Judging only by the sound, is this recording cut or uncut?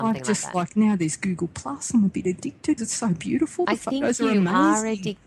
cut